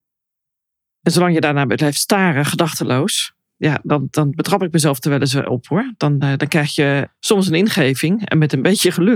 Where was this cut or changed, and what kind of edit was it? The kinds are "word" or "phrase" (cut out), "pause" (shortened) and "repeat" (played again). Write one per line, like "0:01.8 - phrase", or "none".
none